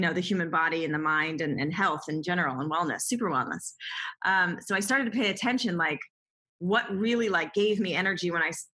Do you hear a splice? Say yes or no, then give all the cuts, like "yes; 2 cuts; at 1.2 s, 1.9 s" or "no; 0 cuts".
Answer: no; 0 cuts